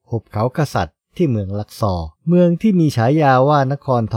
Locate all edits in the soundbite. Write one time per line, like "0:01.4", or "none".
0:02.2